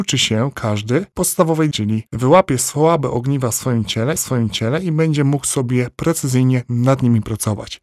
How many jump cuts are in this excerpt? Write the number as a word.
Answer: three